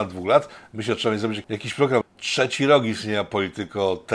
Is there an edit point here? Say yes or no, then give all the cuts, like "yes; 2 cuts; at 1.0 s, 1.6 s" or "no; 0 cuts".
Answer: yes; 1 cut; at 2.0 s